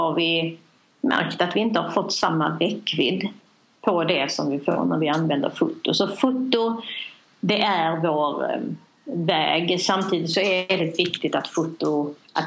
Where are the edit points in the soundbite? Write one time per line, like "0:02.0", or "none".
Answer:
none